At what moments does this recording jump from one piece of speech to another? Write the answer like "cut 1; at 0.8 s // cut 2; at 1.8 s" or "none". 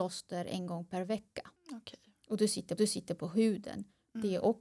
cut 1; at 1.6 s // cut 2; at 2.8 s

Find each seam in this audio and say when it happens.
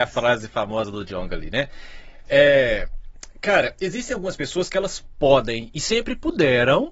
none

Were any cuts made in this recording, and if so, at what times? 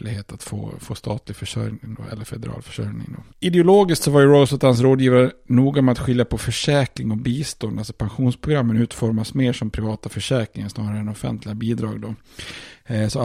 cut 1; at 3.3 s

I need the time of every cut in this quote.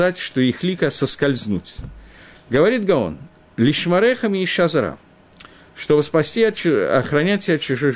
none

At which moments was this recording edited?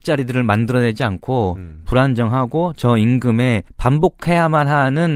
cut 1; at 3.7 s

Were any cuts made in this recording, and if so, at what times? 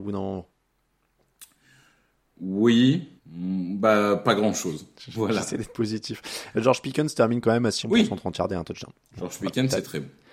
cut 1; at 3.2 s // cut 2; at 7.8 s

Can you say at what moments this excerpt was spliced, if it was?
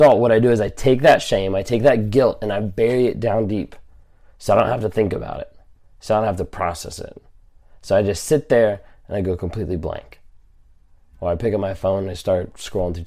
none

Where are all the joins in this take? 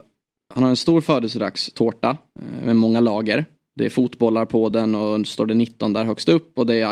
none

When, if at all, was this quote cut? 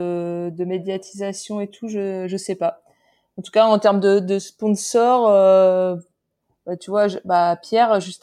none

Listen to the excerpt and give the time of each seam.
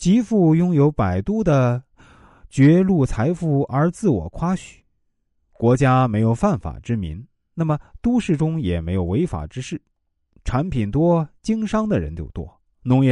none

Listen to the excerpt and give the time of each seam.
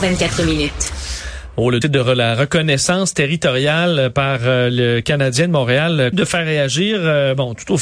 cut 1; at 1.8 s // cut 2; at 6.1 s

